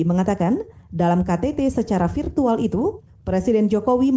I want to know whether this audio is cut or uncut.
uncut